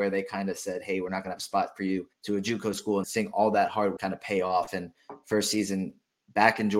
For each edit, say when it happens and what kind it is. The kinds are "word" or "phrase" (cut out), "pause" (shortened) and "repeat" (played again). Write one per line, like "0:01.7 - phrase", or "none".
0:02.1 - pause
0:03.0 - word
0:04.0 - word